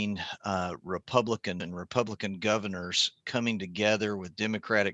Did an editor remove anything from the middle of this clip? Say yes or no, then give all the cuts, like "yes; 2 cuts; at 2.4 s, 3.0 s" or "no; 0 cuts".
yes; 1 cut; at 1.6 s